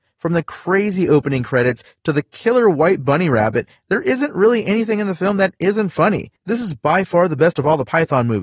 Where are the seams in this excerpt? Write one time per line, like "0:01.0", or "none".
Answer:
0:06.4